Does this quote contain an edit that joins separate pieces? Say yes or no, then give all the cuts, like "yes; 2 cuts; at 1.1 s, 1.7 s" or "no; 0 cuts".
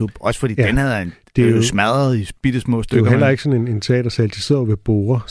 no; 0 cuts